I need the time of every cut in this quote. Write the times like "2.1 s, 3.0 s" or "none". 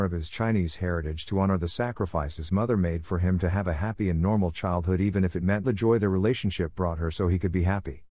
2.5 s, 5.6 s